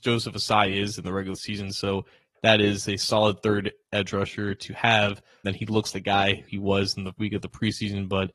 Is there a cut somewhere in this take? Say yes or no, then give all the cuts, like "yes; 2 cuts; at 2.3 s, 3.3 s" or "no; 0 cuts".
yes; 4 cuts; at 5.4 s, 5.9 s, 6.5 s, 7.2 s